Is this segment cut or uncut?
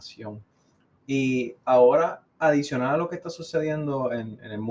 uncut